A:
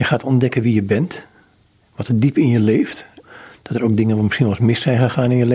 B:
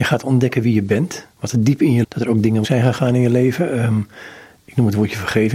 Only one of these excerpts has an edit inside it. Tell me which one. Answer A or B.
B